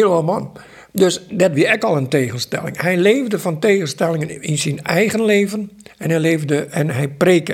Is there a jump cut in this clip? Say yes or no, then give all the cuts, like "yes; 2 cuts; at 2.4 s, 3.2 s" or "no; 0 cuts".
no; 0 cuts